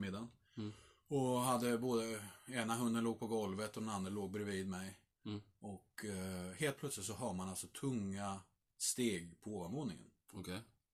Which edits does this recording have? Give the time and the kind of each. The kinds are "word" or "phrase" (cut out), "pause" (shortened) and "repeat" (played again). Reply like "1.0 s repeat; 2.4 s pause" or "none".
none